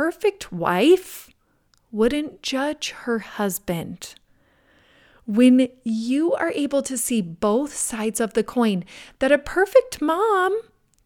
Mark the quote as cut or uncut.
uncut